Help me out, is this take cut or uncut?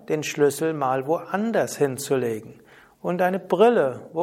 uncut